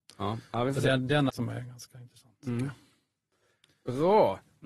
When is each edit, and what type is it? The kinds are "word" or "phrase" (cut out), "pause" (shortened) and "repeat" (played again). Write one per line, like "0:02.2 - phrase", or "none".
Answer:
0:01.3 - word